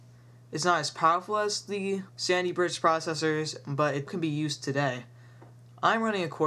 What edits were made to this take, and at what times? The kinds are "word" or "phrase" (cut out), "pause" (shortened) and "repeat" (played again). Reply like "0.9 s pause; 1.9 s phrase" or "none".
2.1 s pause; 4.1 s word

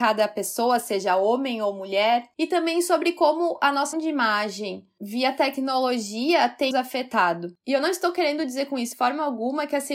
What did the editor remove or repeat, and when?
3.9 s word; 6.7 s word; 8.9 s word

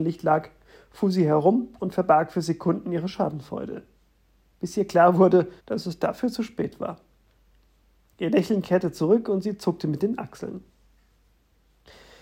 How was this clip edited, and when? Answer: 5.6 s pause

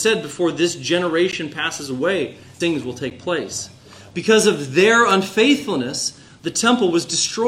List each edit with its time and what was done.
2.6 s word

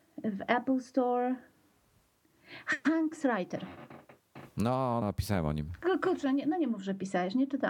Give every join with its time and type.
5.0 s word

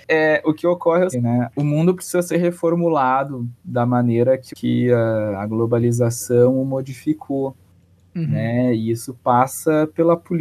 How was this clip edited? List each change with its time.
1.1 s word; 4.5 s word

